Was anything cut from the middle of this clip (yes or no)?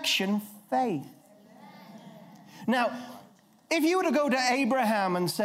no